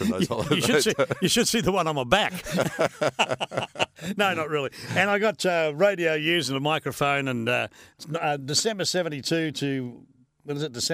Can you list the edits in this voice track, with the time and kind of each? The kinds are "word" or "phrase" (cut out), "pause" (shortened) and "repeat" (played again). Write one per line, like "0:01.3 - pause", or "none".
none